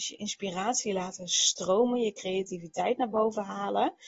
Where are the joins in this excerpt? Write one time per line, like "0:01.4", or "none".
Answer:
none